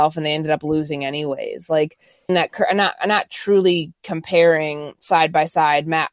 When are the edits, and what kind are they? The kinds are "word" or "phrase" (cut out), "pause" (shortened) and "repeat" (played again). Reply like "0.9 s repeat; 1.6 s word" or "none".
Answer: 2.3 s phrase